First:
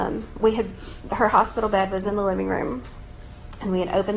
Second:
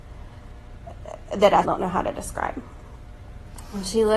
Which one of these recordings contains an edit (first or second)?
second